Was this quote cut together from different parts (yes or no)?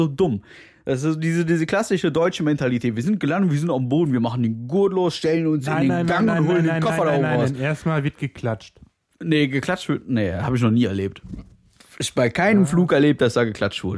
no